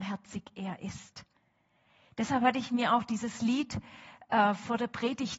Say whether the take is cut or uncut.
uncut